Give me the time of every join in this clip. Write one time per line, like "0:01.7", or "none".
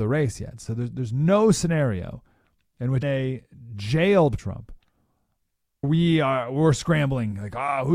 0:03.0
0:04.4
0:05.8